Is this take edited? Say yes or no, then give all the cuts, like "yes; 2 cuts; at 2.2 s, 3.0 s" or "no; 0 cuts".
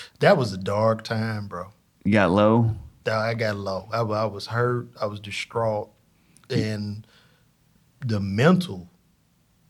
no; 0 cuts